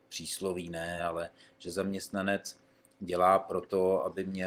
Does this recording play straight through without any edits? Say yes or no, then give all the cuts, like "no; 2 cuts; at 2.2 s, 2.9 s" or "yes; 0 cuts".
yes; 0 cuts